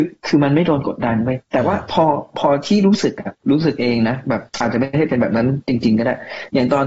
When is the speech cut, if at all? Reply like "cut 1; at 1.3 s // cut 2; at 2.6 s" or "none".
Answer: cut 1; at 1.4 s // cut 2; at 3.4 s // cut 3; at 4.5 s

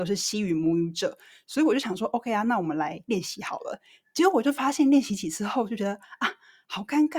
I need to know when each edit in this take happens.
none

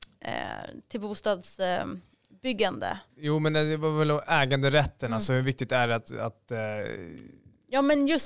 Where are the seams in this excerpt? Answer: cut 1; at 3.1 s

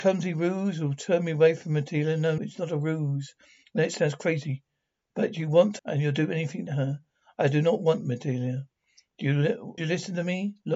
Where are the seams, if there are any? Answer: cut 1; at 2.4 s // cut 2; at 5.8 s // cut 3; at 6.7 s // cut 4; at 9.8 s

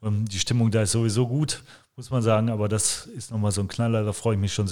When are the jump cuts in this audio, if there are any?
none

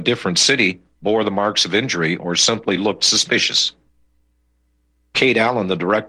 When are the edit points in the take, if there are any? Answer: none

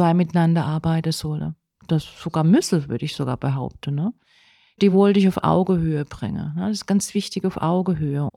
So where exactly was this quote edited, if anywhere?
none

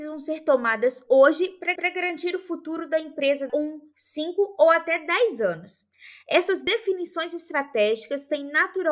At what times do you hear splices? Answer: cut 1; at 1.8 s // cut 2; at 3.5 s

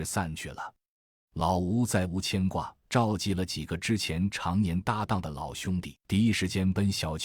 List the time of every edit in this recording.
cut 1; at 2.8 s

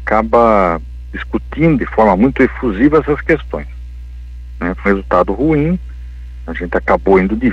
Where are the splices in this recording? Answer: cut 1; at 1.8 s // cut 2; at 4.9 s

